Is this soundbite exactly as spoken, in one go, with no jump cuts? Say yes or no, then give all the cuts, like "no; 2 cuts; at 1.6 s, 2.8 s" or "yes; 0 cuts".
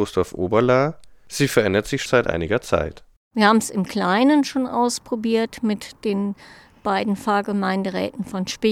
no; 1 cut; at 2.1 s